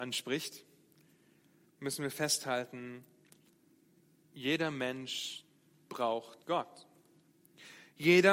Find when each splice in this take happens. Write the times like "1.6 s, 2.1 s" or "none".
6.4 s